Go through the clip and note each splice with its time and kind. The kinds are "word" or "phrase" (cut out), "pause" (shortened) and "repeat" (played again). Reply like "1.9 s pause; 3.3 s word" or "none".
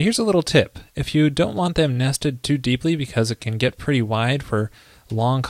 none